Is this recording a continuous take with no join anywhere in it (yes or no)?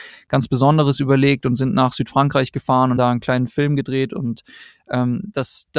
no